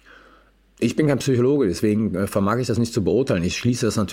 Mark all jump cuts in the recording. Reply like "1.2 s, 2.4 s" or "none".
none